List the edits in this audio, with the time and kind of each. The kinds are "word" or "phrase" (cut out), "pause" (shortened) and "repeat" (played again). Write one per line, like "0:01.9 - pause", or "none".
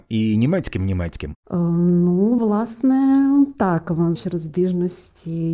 0:04.2 - word